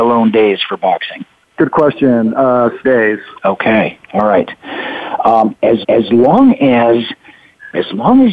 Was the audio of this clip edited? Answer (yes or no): yes